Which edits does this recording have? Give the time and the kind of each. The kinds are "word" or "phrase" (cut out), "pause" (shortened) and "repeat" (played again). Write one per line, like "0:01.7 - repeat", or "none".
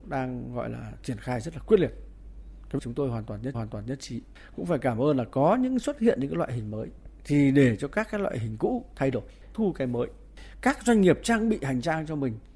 0:02.8 - phrase
0:03.5 - repeat
0:09.5 - phrase